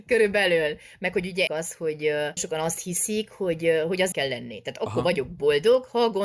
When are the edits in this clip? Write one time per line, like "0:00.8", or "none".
0:01.5
0:02.4
0:04.1